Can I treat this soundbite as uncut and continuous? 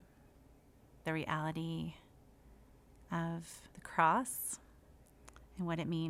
no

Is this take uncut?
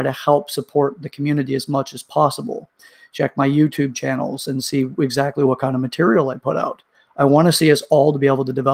yes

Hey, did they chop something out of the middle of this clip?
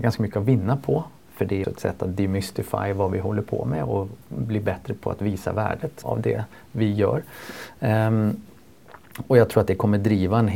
yes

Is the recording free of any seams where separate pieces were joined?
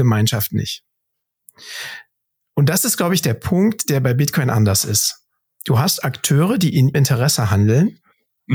no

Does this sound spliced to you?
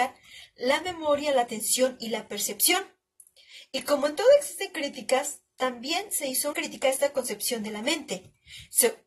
yes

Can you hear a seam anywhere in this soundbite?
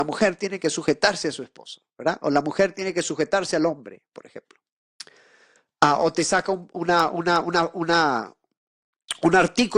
no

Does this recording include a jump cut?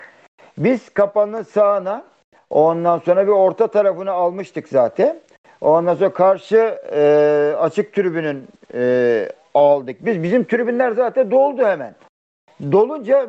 no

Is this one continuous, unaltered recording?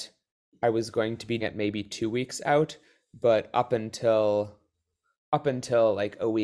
no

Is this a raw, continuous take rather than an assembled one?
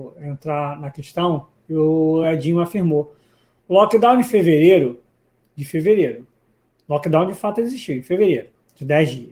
yes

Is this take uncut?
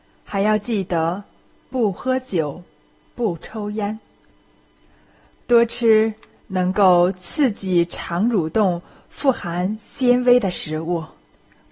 yes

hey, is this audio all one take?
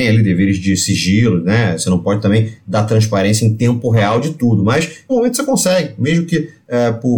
no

